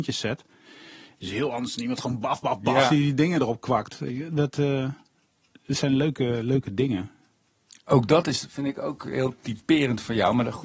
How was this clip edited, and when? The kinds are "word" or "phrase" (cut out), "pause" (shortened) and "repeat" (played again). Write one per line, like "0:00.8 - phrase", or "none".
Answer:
none